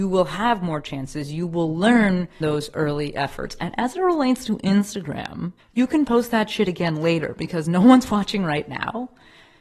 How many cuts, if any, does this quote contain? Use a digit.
2